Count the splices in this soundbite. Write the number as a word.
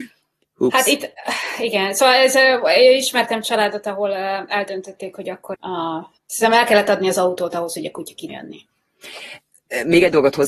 three